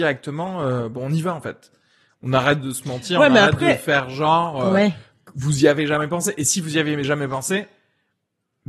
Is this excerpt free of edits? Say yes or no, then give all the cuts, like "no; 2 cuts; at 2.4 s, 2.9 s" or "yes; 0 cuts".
yes; 0 cuts